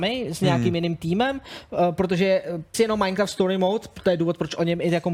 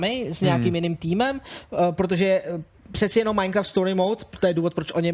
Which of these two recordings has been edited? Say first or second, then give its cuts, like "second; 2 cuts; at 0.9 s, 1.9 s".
first; 1 cut; at 2.7 s